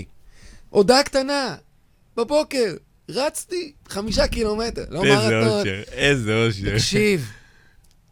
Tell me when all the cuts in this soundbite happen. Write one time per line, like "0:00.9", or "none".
none